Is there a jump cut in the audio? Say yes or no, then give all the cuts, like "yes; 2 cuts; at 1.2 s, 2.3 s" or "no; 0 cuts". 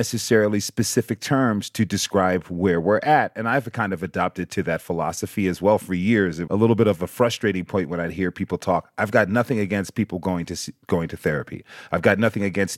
yes; 1 cut; at 6.5 s